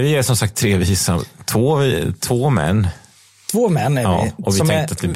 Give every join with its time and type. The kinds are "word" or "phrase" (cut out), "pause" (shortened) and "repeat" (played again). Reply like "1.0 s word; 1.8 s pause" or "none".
none